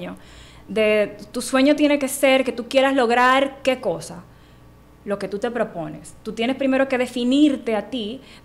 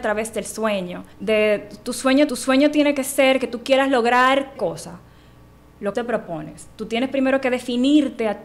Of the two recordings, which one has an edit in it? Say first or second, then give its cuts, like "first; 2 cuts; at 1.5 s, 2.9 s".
second; 4 cuts; at 1.1 s, 2.3 s, 4.6 s, 5.9 s